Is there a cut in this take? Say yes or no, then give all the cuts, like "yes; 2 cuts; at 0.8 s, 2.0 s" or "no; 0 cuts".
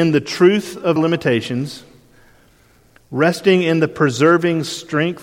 yes; 1 cut; at 1.0 s